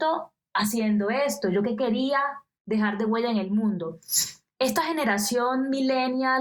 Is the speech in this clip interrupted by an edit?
no; 0 cuts

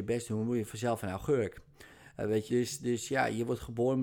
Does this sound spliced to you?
yes; 1 cut; at 2.5 s

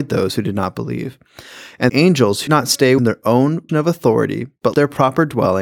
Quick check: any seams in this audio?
yes; 5 cuts; at 1.9 s, 2.5 s, 3.0 s, 3.7 s, 4.7 s

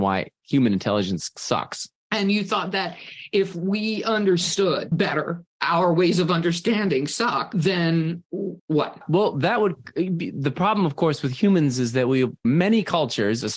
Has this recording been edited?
yes; 3 cuts; at 2.0 s, 5.5 s, 8.6 s

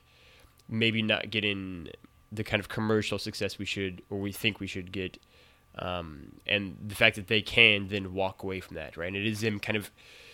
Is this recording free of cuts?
yes; 0 cuts

